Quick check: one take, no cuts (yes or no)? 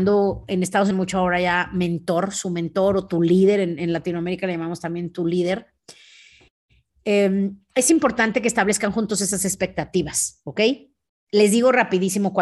no